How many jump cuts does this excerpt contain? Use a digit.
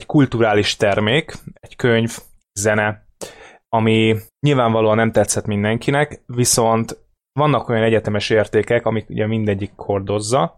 1